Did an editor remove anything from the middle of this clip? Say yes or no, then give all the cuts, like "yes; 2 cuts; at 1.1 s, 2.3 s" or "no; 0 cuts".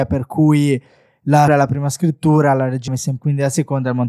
yes; 3 cuts; at 1.5 s, 2.9 s, 3.2 s